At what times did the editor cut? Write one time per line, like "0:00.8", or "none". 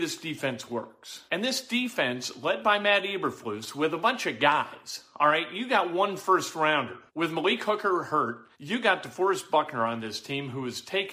0:01.3
0:07.1
0:08.5